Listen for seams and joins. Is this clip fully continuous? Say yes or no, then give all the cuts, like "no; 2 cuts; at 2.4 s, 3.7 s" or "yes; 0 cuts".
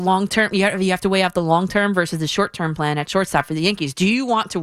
yes; 0 cuts